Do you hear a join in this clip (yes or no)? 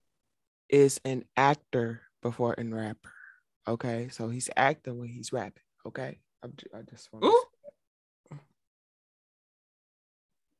no